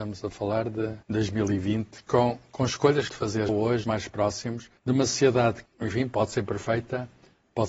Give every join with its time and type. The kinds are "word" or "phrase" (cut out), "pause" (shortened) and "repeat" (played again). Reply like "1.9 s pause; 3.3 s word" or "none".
1.0 s pause; 3.1 s phrase; 3.5 s word; 3.8 s phrase; 4.8 s pause; 5.7 s word